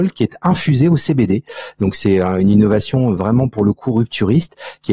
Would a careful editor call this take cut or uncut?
uncut